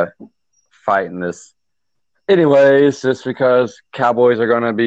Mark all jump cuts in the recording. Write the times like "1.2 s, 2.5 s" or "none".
1.9 s